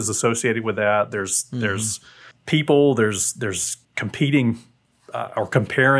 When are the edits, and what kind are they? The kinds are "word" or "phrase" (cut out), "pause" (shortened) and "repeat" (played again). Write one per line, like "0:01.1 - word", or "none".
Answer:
0:02.3 - pause
0:03.8 - pause